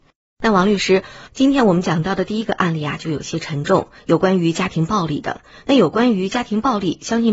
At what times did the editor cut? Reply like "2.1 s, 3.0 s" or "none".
none